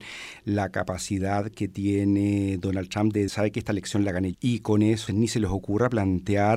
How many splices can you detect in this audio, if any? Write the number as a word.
three